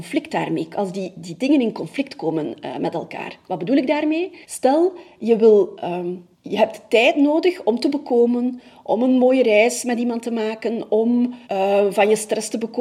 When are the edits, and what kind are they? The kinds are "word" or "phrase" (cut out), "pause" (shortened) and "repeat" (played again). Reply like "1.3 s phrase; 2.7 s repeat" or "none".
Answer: 4.4 s pause; 6.3 s pause; 11.4 s pause

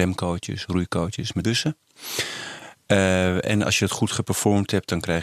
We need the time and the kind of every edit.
1.4 s word

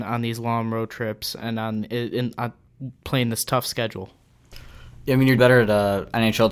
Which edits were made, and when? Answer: 5.4 s word

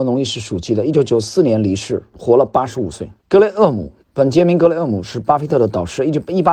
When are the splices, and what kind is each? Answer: 3.2 s pause; 4.0 s pause

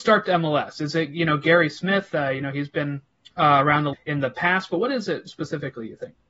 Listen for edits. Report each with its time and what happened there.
3.2 s pause; 3.9 s word

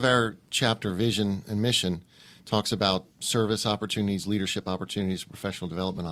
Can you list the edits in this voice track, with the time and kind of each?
3.1 s pause

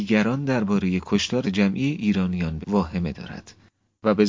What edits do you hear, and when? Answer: 1.4 s word; 2.6 s word

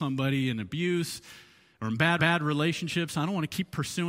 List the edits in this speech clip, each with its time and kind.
2.2 s repeat

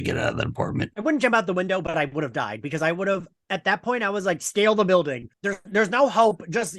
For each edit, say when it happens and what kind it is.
5.3 s pause

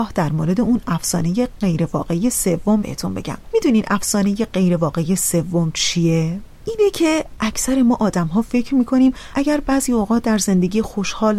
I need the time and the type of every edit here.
2.8 s word

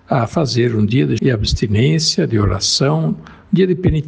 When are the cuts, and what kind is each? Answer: 1.2 s word

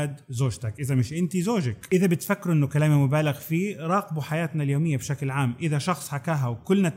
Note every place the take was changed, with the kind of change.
none

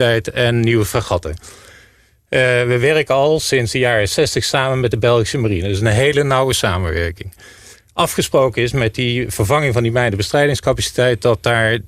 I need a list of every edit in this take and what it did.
none

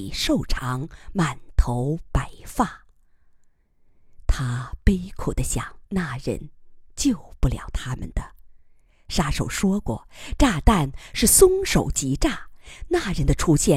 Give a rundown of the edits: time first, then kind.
5.9 s pause

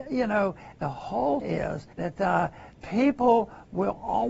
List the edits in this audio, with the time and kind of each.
1.4 s word; 1.9 s pause; 2.7 s word

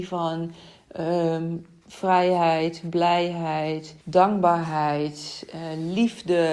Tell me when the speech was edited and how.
4.0 s pause

